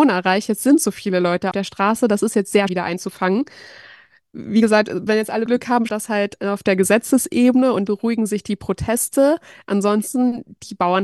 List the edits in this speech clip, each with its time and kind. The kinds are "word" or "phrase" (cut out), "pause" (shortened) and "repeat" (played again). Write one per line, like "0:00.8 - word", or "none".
0:01.5 - word
0:02.7 - word
0:05.1 - word
0:05.5 - word
0:05.9 - word
0:07.9 - word